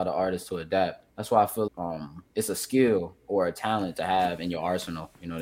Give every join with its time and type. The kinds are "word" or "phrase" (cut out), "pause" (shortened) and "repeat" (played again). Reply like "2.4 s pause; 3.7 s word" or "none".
1.1 s pause; 1.7 s word; 2.3 s pause